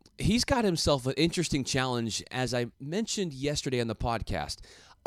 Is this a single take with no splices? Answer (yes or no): no